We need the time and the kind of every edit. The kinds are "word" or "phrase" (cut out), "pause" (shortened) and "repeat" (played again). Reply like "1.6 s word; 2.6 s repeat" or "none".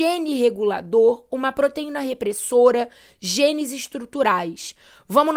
none